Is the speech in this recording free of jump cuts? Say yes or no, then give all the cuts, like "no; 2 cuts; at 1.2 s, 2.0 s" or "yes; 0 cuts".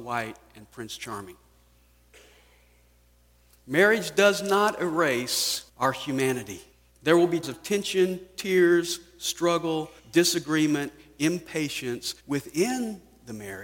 no; 5 cuts; at 5.7 s, 6.7 s, 7.4 s, 10.0 s, 12.2 s